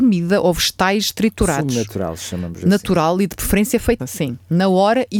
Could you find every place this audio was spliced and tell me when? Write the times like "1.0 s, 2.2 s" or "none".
4.0 s